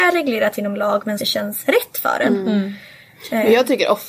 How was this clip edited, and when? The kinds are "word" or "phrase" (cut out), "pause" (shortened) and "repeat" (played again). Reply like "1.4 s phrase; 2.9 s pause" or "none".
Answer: 1.2 s phrase